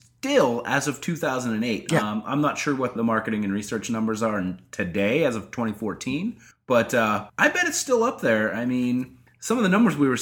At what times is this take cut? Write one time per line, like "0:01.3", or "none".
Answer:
0:03.0
0:06.5
0:07.3